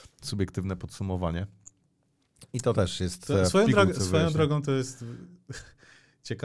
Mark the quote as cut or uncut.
uncut